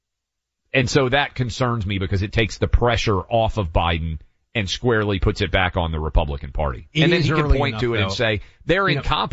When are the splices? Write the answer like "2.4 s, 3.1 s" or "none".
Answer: none